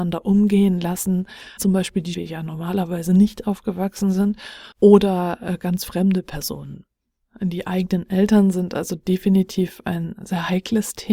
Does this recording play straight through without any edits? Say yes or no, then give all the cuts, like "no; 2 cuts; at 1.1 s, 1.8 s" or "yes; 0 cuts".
no; 3 cuts; at 1.6 s, 2.1 s, 4.7 s